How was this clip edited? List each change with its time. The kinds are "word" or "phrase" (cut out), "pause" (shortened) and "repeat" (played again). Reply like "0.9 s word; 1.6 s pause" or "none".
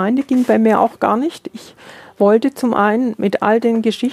none